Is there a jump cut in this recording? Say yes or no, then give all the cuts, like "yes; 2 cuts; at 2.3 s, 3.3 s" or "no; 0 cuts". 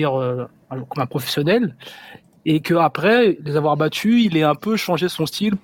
no; 0 cuts